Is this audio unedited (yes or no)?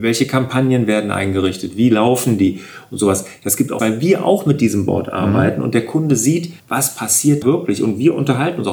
no